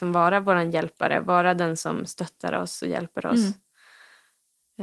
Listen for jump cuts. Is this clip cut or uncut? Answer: uncut